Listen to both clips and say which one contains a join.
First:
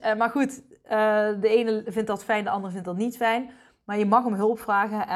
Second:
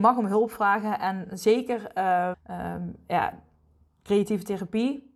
second; 1 cut; at 2.3 s

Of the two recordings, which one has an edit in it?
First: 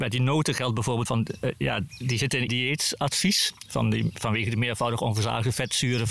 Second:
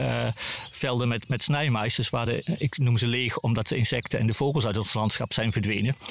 first; 3 cuts; at 1.1 s, 1.9 s, 2.5 s

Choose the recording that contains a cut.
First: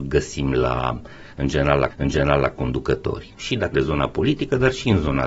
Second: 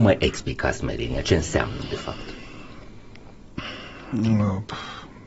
first; 2 cuts; at 1.9 s, 3.7 s

